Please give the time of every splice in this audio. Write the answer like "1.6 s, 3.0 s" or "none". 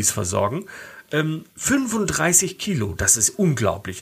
1.5 s